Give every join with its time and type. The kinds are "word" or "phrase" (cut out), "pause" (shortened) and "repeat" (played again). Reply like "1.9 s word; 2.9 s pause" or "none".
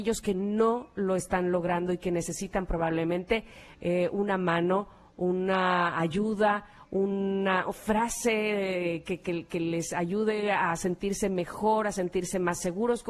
none